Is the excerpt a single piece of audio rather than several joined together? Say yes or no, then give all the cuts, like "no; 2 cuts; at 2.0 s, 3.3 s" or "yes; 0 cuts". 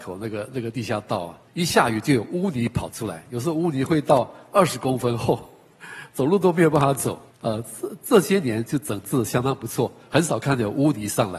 no; 2 cuts; at 1.5 s, 7.3 s